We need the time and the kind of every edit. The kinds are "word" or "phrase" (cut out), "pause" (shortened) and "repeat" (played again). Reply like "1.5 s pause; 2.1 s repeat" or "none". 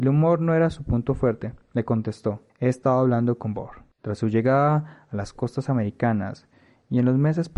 2.5 s pause; 3.9 s pause